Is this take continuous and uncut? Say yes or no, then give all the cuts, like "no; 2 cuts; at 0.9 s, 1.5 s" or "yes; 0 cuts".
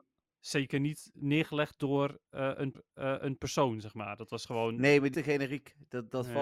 no; 2 cuts; at 2.7 s, 5.1 s